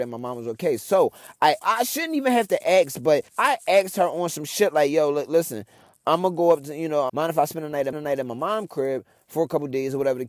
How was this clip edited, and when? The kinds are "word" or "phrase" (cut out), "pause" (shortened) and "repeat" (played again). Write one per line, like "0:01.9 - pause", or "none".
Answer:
0:01.6 - phrase
0:03.3 - pause
0:07.1 - phrase
0:07.9 - repeat